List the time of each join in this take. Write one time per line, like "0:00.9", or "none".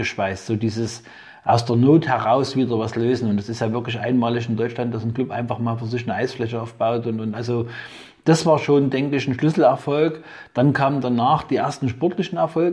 none